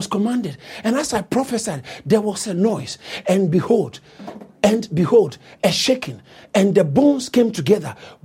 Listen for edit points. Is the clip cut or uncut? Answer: uncut